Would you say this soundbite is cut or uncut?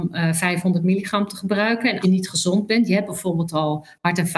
cut